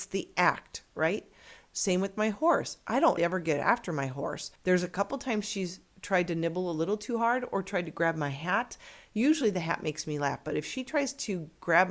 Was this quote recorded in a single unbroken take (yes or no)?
no